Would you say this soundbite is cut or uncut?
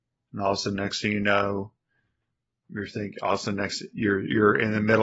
uncut